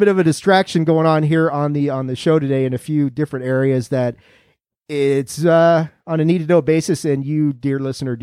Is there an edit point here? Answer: no; 0 cuts

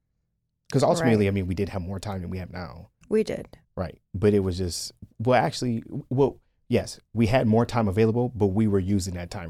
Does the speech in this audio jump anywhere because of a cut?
yes; 2 cuts; at 3.0 s, 3.6 s

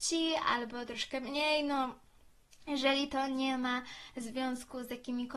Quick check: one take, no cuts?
yes; 0 cuts

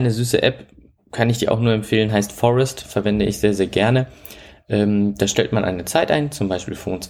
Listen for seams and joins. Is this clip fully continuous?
yes; 0 cuts

